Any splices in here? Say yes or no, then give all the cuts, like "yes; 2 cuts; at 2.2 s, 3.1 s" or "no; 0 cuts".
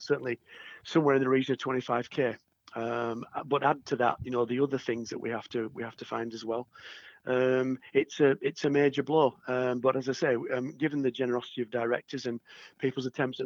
no; 0 cuts